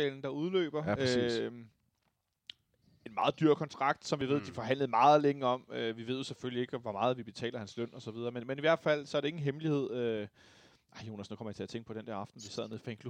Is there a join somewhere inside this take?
no; 0 cuts

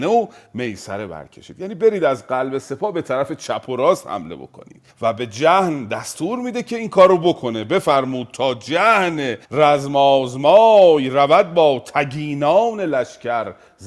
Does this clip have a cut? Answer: yes; 2 cuts; at 4.9 s, 9.4 s

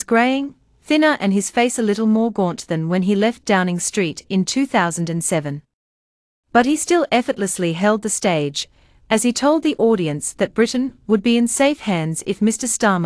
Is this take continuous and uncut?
yes; 0 cuts

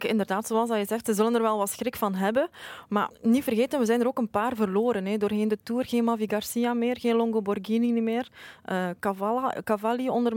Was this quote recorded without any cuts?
no; 1 cut; at 3.1 s

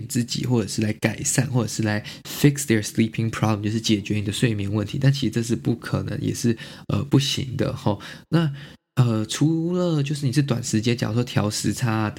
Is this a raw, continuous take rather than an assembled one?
yes; 0 cuts

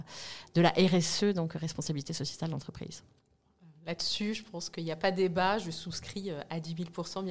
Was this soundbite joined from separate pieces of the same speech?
no; 0 cuts

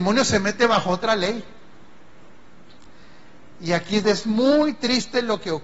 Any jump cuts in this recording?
yes; 1 cut; at 4.0 s

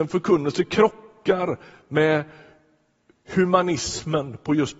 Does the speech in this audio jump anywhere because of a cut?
no; 0 cuts

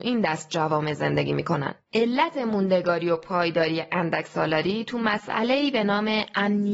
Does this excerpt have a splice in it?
yes; 1 cut; at 1.8 s

